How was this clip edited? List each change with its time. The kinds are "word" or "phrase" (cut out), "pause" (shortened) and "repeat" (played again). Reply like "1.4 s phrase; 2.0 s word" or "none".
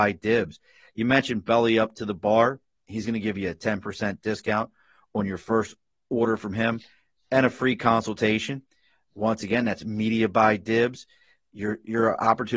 none